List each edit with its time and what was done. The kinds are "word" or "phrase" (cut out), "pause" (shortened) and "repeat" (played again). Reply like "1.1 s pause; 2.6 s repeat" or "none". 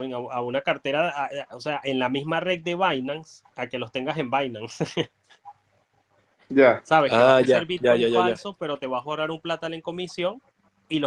3.5 s pause